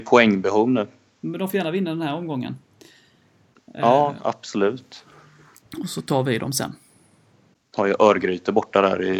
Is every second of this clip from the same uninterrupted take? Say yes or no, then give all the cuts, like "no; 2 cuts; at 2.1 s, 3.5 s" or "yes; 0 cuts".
yes; 0 cuts